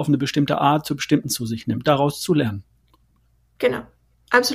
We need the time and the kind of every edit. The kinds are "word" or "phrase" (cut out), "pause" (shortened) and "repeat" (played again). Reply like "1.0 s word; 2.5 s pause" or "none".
1.2 s word; 1.8 s word